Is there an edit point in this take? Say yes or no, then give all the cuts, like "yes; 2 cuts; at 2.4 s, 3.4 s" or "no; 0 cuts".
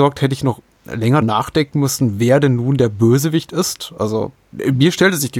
yes; 1 cut; at 1.2 s